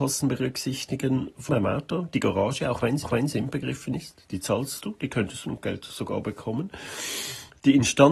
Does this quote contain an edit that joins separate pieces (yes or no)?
yes